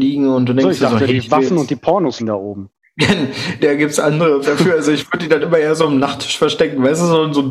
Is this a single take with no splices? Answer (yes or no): no